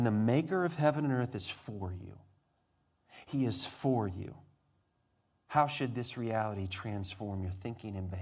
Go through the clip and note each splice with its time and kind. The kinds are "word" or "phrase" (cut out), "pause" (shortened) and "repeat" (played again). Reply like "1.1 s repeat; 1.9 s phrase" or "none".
4.8 s pause